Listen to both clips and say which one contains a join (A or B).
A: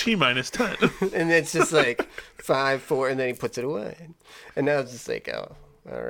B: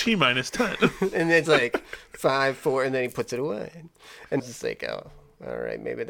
B